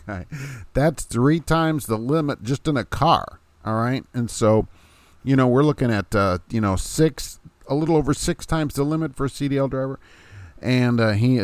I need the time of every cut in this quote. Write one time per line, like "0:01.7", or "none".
none